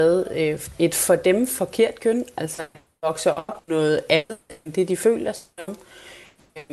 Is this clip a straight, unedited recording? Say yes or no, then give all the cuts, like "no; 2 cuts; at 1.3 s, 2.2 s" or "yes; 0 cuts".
no; 1 cut; at 3.6 s